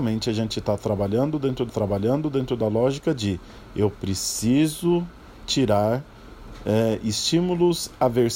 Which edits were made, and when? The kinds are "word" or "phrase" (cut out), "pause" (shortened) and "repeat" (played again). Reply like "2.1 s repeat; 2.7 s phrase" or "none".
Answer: 1.7 s repeat